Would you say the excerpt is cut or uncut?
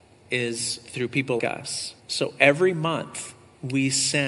cut